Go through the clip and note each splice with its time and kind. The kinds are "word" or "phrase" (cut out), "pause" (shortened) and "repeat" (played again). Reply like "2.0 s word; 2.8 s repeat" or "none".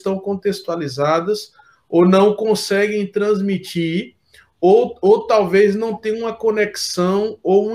none